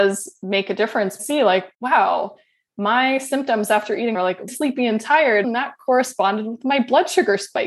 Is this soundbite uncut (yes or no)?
no